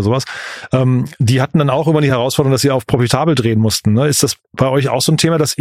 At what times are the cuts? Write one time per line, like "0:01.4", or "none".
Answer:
none